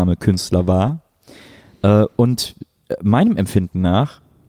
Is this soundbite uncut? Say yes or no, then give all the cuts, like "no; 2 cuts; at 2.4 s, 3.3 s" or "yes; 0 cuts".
yes; 0 cuts